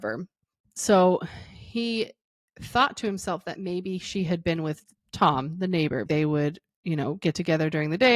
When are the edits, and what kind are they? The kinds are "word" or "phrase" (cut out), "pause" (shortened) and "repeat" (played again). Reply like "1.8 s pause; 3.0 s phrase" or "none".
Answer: 6.1 s phrase